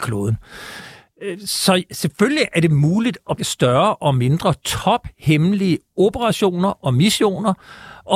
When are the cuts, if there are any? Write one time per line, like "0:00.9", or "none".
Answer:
0:03.4